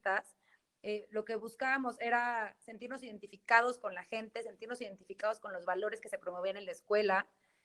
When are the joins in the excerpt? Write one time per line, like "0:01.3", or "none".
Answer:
none